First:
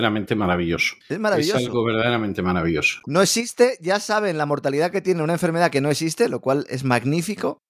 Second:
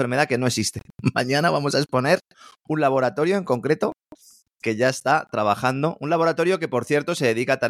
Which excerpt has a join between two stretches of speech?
first; 1 cut; at 1.0 s

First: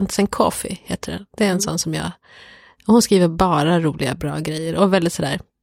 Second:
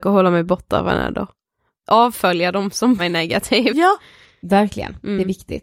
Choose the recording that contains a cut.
second; 1 cut; at 3.0 s

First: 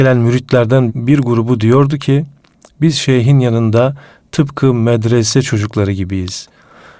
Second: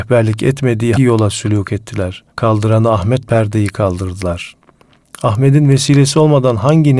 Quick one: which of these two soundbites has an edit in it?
second; 3 cuts; at 1.0 s, 2.3 s, 3.2 s

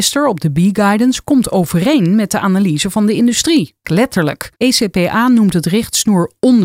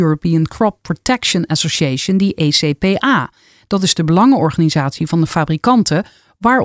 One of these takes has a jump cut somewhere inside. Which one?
first; 2 cuts; at 3.8 s, 4.6 s

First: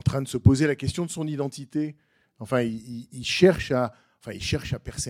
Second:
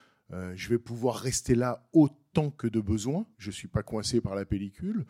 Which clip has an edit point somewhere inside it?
second; 1 cut; at 3.3 s

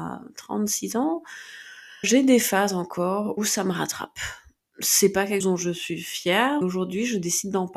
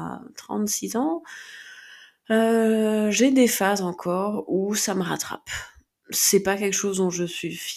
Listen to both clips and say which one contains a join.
first; 4 cuts; at 2.0 s, 3.4 s, 5.4 s, 6.6 s

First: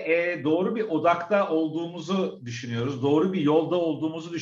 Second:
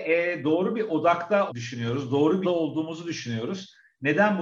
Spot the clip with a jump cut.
second; 2 cuts; at 1.5 s, 2.4 s

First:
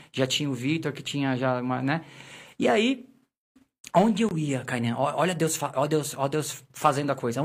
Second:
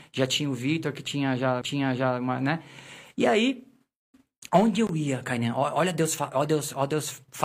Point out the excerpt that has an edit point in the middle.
second; 1 cut; at 1.6 s

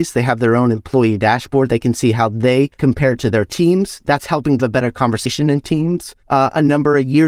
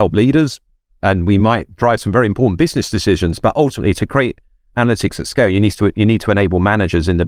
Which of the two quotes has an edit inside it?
first; 3 cuts; at 2.7 s, 4.6 s, 6.2 s

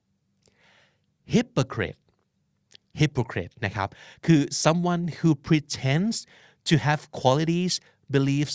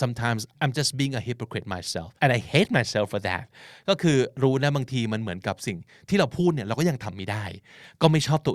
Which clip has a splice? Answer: second; 1 cut; at 2.2 s

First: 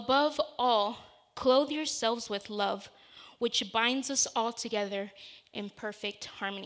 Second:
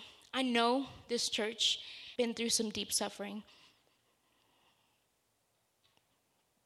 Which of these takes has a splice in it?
second; 1 cut; at 2.2 s

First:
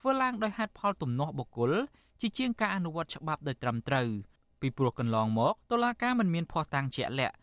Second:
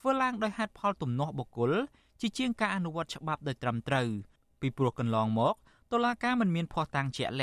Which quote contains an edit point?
first; 1 cut; at 5.6 s

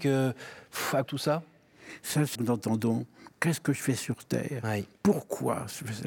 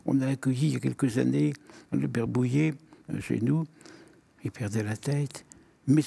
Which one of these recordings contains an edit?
first; 2 cuts; at 1.1 s, 2.3 s

